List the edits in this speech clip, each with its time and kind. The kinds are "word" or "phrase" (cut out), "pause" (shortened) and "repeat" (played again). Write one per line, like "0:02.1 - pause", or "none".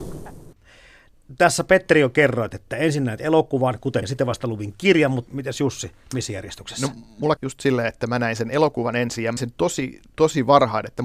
0:04.0 - word
0:05.3 - word
0:07.4 - word
0:09.4 - word